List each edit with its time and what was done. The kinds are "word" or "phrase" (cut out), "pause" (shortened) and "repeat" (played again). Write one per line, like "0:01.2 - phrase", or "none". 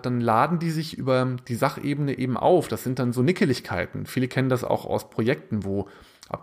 none